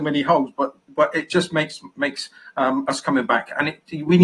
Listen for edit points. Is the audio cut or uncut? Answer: uncut